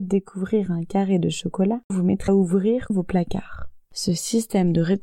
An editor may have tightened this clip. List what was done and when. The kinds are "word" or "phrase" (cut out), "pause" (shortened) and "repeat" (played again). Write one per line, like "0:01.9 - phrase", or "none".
0:01.9 - word
0:02.3 - word
0:02.9 - word

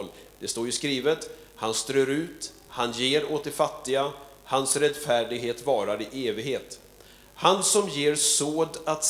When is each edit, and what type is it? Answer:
none

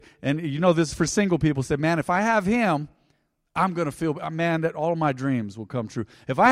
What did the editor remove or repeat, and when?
none

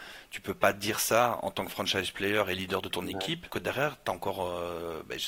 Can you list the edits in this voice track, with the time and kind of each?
0:03.5 - word

